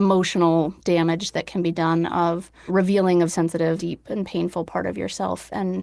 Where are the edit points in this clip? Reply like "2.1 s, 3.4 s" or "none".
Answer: 2.7 s, 3.3 s, 3.8 s